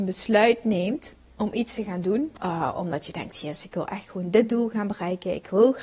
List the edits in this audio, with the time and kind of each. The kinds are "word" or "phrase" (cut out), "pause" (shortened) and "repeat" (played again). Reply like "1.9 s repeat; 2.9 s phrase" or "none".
2.4 s pause